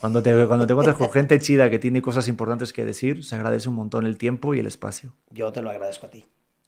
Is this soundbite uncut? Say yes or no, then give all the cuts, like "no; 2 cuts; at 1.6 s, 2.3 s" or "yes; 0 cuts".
no; 1 cut; at 5.2 s